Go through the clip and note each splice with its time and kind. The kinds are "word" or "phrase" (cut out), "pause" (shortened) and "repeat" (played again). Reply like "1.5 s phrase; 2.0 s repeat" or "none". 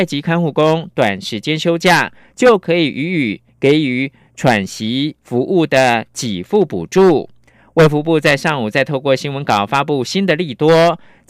none

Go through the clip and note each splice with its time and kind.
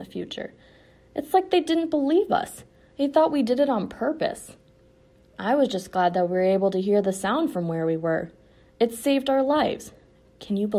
none

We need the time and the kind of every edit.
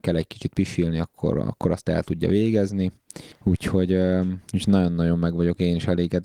4.4 s pause

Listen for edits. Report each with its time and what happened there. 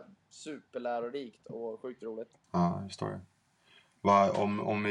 2.4 s pause

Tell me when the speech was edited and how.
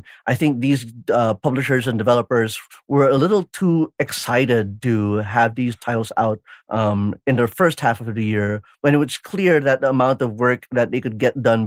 none

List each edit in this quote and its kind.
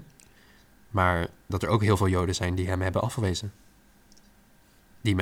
1.5 s word

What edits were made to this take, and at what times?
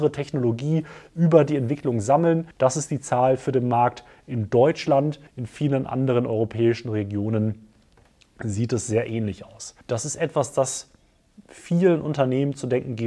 2.5 s pause; 5.3 s pause; 9.8 s pause

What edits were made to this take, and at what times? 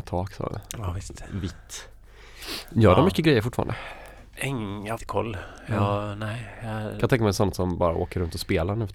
5.0 s phrase

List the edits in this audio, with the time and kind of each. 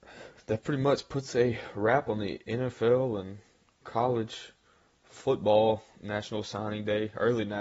2.4 s pause

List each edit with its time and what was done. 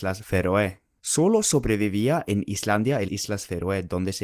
3.1 s word

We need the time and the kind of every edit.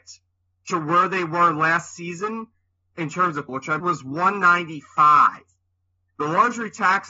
3.5 s word; 3.8 s word

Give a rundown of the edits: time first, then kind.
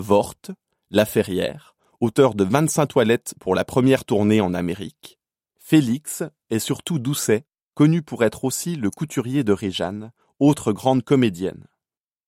none

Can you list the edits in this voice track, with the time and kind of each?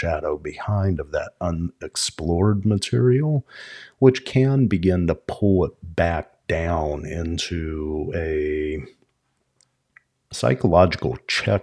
none

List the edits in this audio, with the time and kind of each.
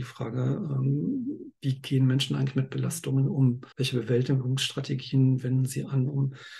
3.7 s pause

